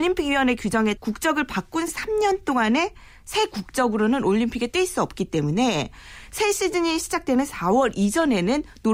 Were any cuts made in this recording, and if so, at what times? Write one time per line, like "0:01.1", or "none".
0:01.0
0:01.9